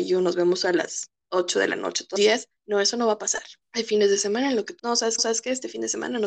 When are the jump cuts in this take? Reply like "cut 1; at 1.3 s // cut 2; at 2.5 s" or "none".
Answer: cut 1; at 2.2 s // cut 2; at 2.6 s // cut 3; at 3.6 s // cut 4; at 4.8 s // cut 5; at 5.2 s